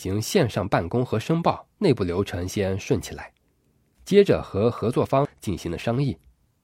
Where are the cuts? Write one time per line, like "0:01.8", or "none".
0:01.7